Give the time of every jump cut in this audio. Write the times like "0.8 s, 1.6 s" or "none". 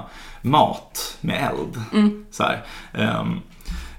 none